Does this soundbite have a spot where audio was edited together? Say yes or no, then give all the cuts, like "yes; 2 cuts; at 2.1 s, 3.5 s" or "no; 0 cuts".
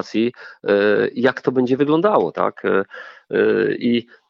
no; 0 cuts